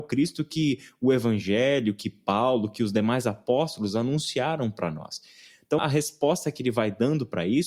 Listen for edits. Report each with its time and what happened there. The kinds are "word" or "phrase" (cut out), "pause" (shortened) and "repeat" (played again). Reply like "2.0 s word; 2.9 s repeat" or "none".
5.8 s word